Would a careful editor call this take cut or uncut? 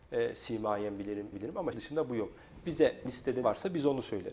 cut